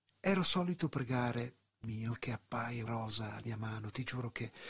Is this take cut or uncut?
cut